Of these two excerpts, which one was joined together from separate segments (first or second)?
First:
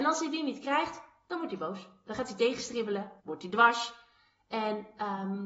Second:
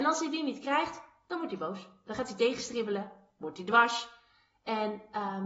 first